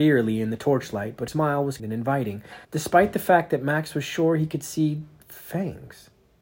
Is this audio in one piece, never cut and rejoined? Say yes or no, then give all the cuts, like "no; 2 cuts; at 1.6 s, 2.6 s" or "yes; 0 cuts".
no; 3 cuts; at 1.3 s, 1.8 s, 2.6 s